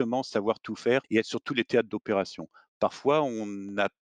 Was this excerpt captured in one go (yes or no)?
no